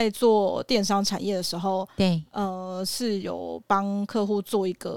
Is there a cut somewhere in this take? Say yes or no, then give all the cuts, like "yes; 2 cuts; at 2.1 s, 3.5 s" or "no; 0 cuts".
no; 0 cuts